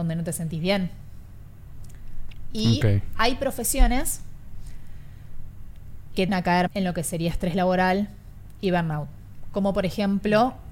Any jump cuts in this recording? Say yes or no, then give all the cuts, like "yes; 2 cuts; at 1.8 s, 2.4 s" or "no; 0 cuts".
yes; 2 cuts; at 6.3 s, 6.7 s